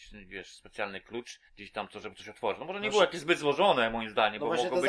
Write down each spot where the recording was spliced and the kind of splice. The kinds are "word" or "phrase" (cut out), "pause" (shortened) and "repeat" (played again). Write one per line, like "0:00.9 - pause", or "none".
0:01.5 - pause